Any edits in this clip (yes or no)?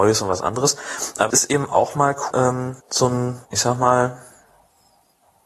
yes